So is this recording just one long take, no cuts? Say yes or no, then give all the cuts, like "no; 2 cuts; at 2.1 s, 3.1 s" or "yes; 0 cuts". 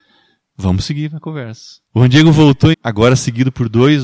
no; 2 cuts; at 1.9 s, 2.7 s